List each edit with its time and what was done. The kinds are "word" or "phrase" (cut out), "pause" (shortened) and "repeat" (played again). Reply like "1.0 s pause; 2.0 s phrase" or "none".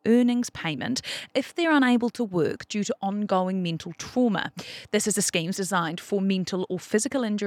5.5 s word